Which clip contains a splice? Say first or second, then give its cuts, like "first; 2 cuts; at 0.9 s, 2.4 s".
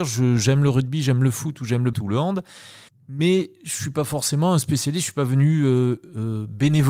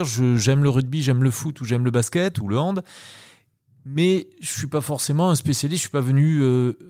first; 2 cuts; at 1.9 s, 2.9 s